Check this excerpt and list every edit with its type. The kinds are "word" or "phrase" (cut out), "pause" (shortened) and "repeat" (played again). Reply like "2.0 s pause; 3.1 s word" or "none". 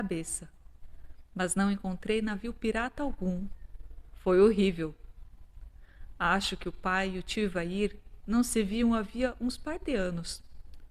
none